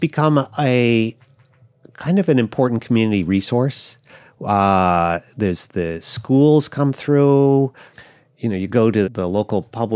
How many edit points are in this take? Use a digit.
1